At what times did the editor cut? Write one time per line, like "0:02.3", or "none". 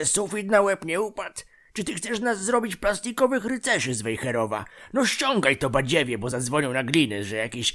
none